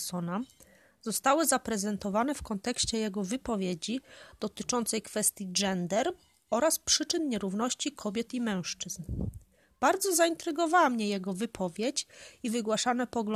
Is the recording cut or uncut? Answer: uncut